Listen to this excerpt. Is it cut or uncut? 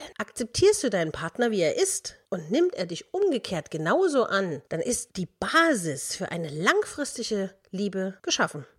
cut